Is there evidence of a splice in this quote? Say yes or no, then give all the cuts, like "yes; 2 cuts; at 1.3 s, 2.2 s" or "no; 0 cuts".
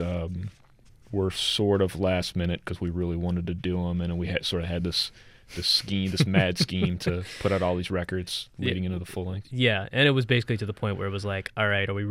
no; 0 cuts